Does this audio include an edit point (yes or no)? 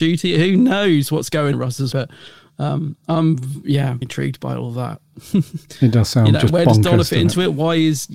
yes